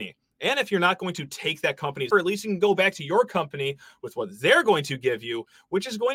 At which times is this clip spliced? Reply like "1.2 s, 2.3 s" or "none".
2.1 s